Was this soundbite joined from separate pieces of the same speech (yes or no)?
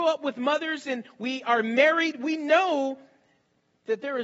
no